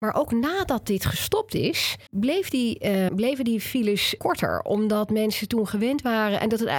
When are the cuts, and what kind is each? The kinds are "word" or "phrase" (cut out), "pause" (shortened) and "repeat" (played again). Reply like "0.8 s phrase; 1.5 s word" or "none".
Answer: 2.1 s pause; 3.1 s word; 4.2 s word